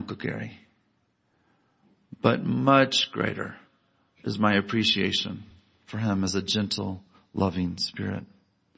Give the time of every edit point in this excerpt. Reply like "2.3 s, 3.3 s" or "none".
none